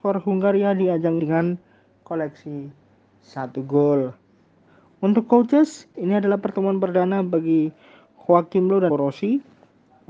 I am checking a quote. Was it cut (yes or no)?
yes